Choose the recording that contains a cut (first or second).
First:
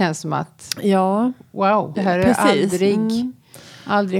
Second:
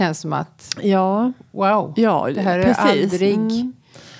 first